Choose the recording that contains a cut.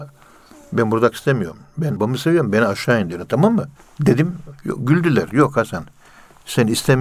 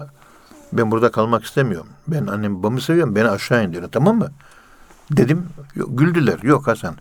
first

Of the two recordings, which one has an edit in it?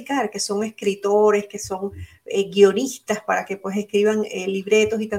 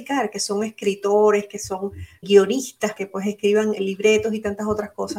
second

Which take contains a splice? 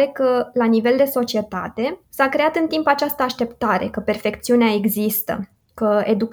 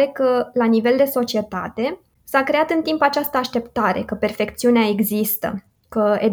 first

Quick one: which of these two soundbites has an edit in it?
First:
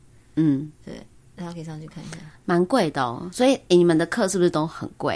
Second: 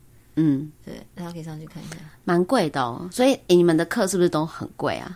second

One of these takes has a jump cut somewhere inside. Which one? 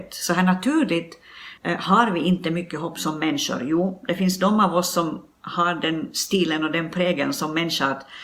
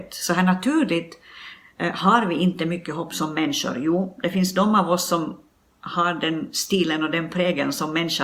first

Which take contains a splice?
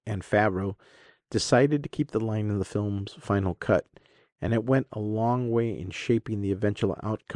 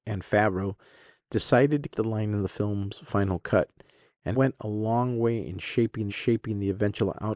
second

